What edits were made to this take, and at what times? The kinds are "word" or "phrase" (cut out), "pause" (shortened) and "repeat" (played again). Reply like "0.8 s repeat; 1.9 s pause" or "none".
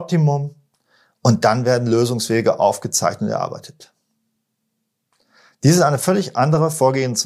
none